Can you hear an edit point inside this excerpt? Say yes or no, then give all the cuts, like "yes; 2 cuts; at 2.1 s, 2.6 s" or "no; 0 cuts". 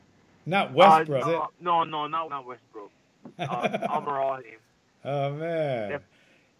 yes; 4 cuts; at 1.2 s, 1.5 s, 2.2 s, 4.4 s